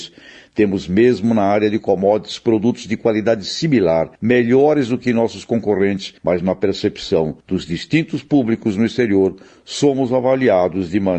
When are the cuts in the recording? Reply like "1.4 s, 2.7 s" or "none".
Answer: 4.2 s, 6.2 s, 7.4 s